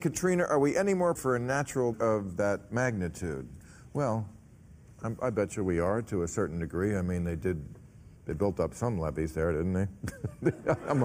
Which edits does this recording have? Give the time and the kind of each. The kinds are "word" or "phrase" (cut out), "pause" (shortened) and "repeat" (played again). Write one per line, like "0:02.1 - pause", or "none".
0:01.2 - word
0:01.9 - word
0:08.2 - pause